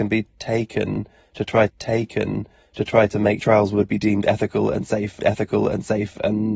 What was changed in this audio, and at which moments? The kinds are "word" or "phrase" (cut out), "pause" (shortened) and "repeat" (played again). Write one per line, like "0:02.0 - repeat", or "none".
0:01.7 - repeat
0:03.4 - phrase
0:05.2 - repeat